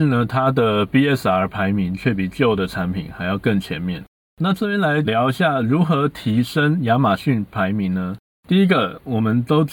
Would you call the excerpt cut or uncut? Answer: cut